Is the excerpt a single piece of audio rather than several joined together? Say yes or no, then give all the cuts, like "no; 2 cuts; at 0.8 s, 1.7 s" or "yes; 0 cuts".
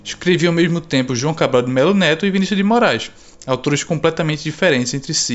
yes; 0 cuts